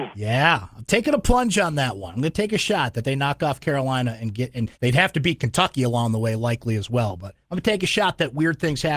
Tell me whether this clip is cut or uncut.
cut